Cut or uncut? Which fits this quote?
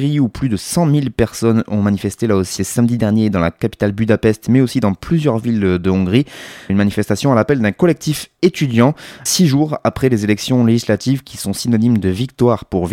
cut